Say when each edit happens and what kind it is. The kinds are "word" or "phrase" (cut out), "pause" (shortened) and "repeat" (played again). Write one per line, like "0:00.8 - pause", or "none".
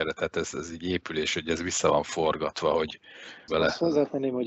0:03.5 - phrase